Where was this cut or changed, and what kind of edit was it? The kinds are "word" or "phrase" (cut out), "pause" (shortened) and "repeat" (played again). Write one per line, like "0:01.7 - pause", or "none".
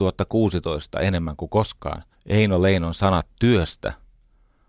0:02.1 - pause